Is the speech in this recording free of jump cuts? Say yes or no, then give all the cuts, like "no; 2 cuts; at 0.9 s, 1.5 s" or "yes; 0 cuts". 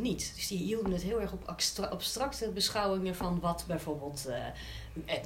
yes; 0 cuts